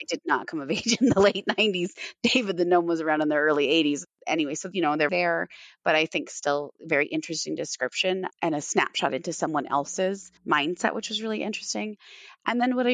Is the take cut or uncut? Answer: cut